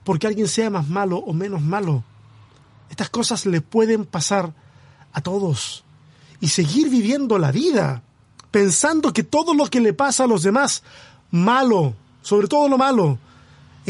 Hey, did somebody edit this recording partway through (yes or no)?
no